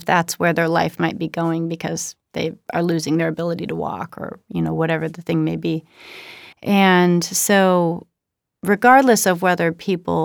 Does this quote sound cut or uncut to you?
cut